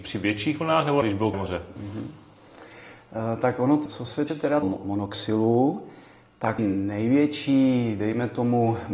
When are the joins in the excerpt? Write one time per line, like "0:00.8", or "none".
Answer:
0:01.0
0:01.3
0:03.9
0:04.3
0:04.6
0:06.6